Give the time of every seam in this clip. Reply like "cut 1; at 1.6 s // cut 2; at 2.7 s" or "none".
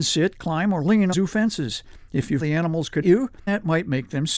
cut 1; at 1.1 s // cut 2; at 2.4 s // cut 3; at 3.0 s // cut 4; at 3.5 s